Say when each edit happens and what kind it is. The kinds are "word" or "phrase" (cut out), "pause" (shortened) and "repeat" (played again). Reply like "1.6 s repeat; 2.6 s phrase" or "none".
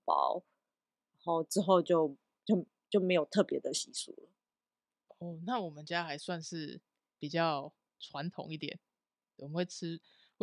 none

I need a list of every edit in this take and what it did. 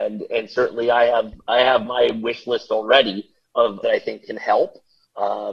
3.8 s phrase

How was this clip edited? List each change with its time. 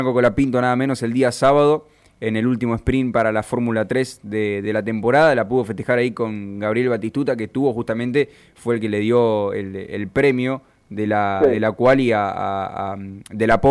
none

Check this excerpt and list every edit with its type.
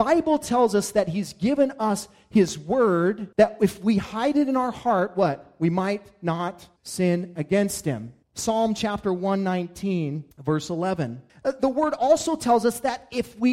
3.3 s pause; 6.8 s pause; 8.2 s pause; 10.3 s pause; 11.3 s pause

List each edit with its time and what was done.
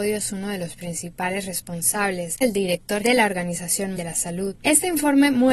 2.4 s word; 3.0 s word; 4.0 s word

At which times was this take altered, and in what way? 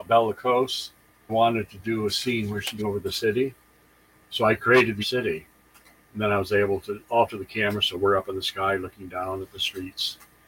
1.3 s word; 2.8 s word; 5.0 s word

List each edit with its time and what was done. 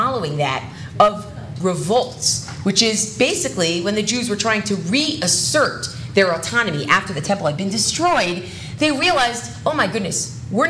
1.6 s phrase

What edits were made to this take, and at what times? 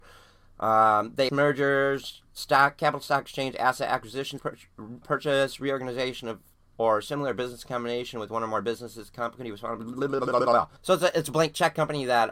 1.3 s word; 4.4 s word; 5.0 s word; 10.8 s pause

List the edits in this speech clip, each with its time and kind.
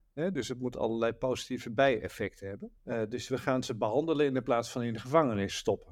2.8 s pause

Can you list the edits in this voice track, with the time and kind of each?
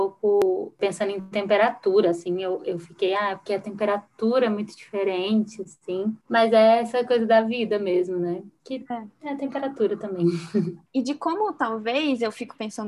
none

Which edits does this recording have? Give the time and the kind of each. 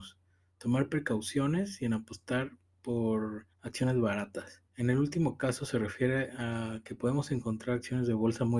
3.5 s pause; 4.7 s pause

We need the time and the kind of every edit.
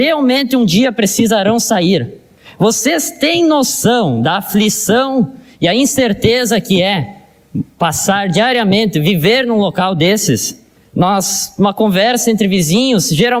none

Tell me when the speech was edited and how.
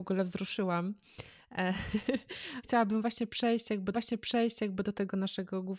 2.6 s word; 3.9 s repeat

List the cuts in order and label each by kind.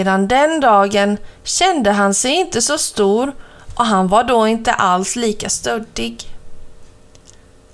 none

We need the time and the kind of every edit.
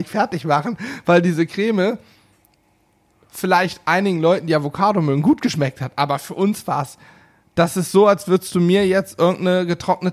none

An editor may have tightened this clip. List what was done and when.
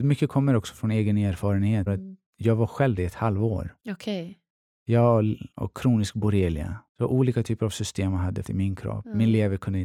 1.9 s word; 3.0 s word; 5.5 s pause; 6.9 s pause; 8.4 s word

